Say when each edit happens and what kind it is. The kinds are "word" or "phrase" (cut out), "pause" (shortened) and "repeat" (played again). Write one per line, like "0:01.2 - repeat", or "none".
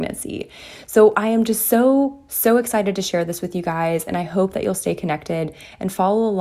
none